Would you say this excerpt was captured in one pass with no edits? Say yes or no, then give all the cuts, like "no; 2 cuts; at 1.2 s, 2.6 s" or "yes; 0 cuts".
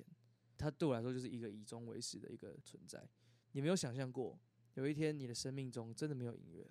yes; 0 cuts